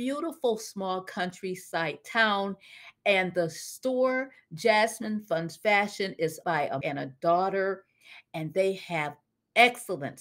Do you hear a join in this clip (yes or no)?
yes